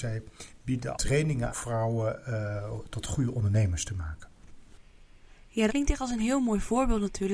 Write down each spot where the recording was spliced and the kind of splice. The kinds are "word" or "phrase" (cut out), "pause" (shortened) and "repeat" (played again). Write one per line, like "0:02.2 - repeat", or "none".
0:00.9 - word
0:01.5 - phrase
0:05.7 - word